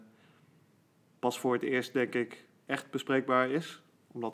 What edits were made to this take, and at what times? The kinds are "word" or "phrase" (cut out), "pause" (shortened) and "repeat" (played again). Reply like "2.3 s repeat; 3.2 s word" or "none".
none